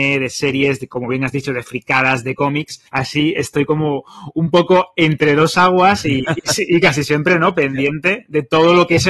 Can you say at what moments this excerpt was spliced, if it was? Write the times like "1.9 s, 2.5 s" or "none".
2.9 s